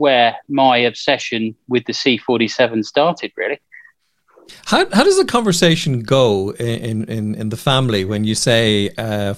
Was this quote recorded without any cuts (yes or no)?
yes